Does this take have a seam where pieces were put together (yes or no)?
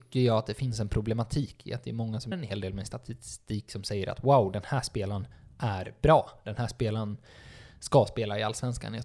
yes